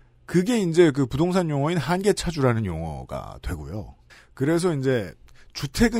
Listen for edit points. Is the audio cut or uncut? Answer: uncut